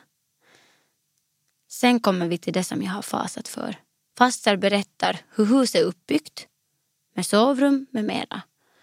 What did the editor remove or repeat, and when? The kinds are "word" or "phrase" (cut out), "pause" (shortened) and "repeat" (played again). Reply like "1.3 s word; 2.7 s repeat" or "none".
3.9 s pause